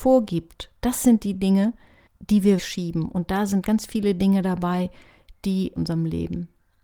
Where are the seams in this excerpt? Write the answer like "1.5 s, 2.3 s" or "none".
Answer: 2.1 s, 2.6 s, 5.8 s